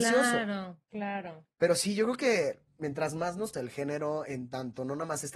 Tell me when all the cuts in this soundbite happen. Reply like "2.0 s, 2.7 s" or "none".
3.5 s